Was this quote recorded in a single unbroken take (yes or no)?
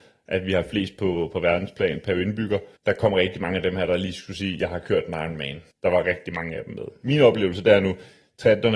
no